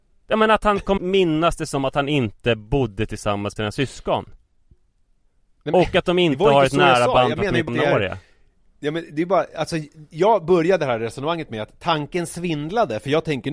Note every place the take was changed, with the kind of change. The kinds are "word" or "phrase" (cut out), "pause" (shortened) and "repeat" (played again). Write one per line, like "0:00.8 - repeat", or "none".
0:01.0 - word
0:03.6 - word
0:07.7 - word